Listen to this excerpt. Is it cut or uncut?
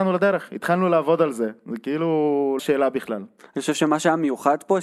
cut